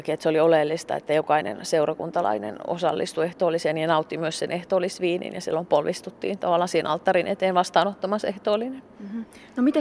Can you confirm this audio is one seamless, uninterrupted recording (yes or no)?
yes